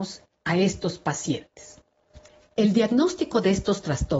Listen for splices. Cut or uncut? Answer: uncut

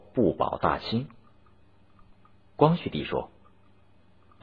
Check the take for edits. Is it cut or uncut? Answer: uncut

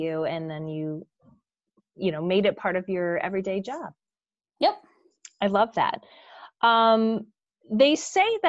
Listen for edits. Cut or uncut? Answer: uncut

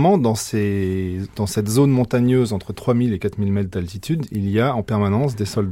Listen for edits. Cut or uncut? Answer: uncut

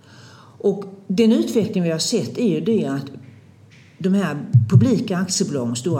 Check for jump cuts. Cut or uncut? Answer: uncut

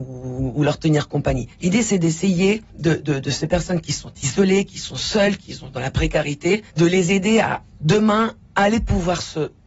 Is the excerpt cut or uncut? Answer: cut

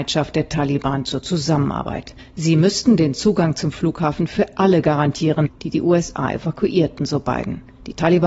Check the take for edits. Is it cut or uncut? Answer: uncut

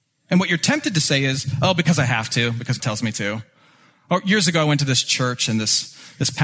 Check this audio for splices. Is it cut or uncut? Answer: cut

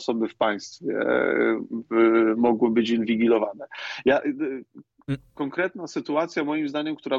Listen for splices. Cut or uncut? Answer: uncut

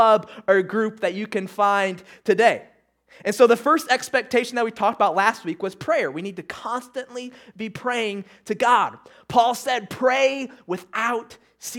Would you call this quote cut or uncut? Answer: uncut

